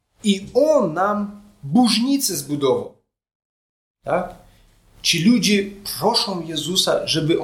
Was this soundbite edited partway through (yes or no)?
no